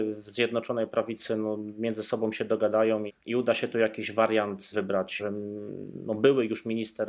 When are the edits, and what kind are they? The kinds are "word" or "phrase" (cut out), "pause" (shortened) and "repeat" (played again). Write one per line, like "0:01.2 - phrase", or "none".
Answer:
0:03.1 - word
0:04.7 - word
0:05.2 - word